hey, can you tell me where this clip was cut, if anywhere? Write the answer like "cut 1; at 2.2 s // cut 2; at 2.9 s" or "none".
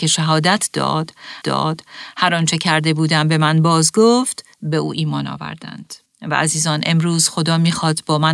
cut 1; at 1.4 s // cut 2; at 4.5 s // cut 3; at 6.1 s